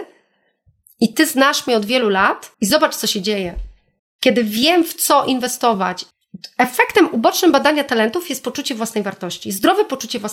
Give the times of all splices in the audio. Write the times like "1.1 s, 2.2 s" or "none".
2.5 s